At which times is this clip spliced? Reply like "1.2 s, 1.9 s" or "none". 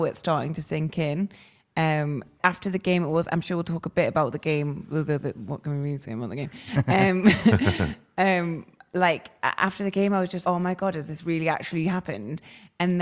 2.4 s, 10.4 s